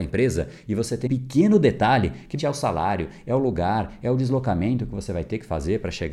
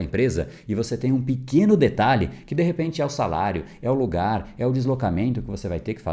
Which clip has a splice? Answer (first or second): first